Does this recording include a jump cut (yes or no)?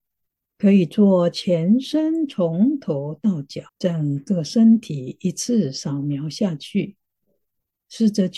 yes